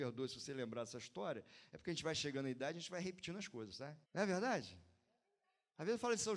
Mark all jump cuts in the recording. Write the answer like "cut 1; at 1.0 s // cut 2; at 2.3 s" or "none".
cut 1; at 4.0 s